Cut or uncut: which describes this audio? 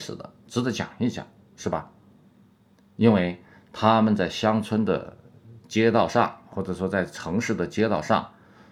uncut